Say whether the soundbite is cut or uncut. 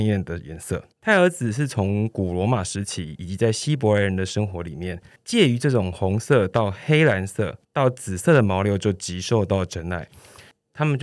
cut